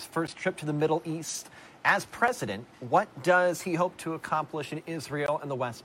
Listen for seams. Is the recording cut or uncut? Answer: uncut